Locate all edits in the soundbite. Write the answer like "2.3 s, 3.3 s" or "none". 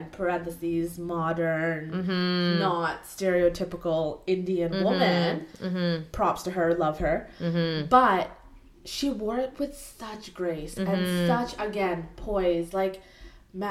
none